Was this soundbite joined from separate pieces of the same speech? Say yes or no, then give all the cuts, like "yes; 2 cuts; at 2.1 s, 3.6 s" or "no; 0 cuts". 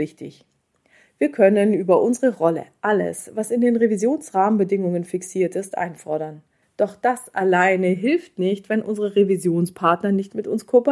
yes; 1 cut; at 6.6 s